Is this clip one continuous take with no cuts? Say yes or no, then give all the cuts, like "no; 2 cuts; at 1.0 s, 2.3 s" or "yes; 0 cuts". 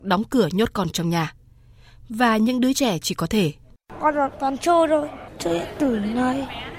yes; 0 cuts